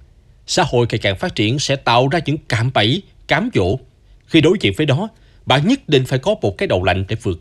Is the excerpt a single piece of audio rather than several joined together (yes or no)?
yes